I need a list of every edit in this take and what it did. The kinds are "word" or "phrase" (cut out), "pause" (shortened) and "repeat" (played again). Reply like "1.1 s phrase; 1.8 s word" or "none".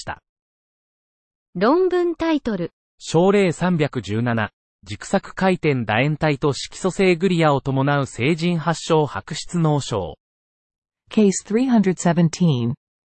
none